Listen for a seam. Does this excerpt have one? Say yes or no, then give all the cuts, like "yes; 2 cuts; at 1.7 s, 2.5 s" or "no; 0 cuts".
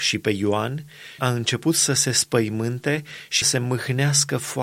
yes; 2 cuts; at 1.2 s, 3.4 s